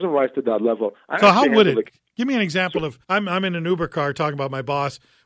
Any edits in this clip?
yes; 1 cut; at 3.0 s

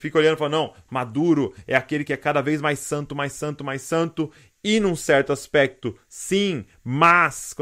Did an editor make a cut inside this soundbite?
no; 0 cuts

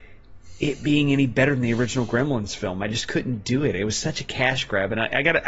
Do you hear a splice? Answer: no; 0 cuts

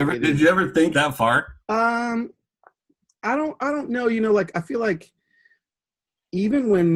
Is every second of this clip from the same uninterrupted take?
no; 2 cuts; at 0.9 s, 1.6 s

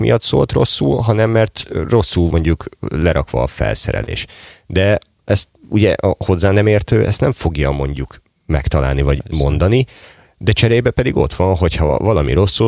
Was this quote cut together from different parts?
yes; 1 cut; at 2.3 s

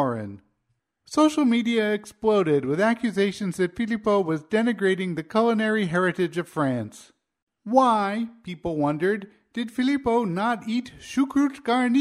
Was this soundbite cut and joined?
no; 0 cuts

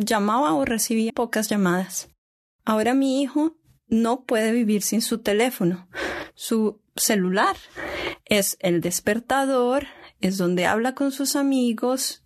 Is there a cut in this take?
yes; 1 cut; at 1.1 s

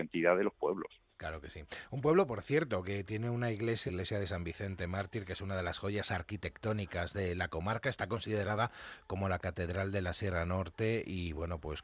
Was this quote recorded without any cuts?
no; 1 cut; at 3.9 s

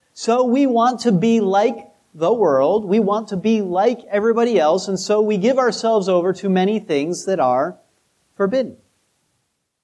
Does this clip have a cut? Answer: no; 0 cuts

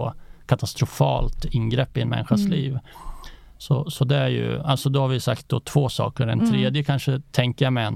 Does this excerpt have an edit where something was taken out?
no; 0 cuts

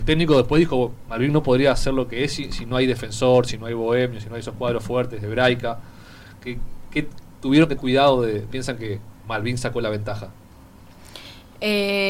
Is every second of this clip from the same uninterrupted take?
no; 2 cuts; at 7.8 s, 8.5 s

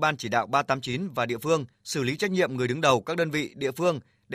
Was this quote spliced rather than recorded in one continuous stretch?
yes; 1 cut; at 1.7 s

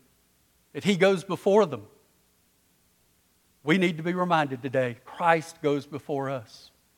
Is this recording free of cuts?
yes; 0 cuts

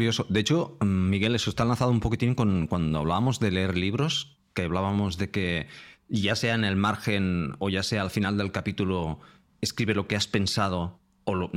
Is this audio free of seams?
yes; 0 cuts

